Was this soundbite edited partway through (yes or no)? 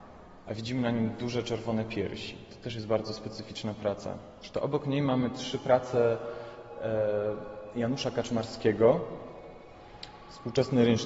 no